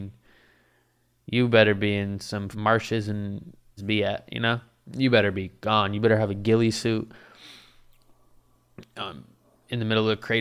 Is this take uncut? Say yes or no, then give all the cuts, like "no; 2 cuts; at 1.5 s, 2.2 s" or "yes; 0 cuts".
no; 2 cuts; at 2.5 s, 3.8 s